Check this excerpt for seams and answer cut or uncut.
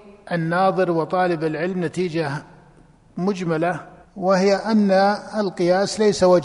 cut